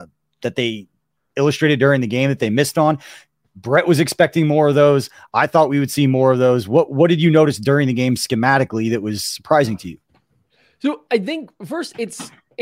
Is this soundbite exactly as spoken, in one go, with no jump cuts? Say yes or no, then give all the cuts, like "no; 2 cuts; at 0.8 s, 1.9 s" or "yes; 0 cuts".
yes; 0 cuts